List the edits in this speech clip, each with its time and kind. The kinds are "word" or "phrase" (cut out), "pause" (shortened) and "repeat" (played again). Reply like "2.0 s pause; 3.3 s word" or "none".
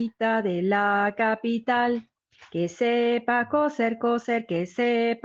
none